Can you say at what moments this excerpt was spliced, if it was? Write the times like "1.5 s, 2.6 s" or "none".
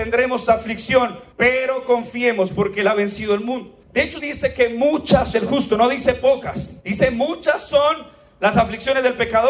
1.3 s, 3.8 s, 4.2 s, 5.3 s, 6.8 s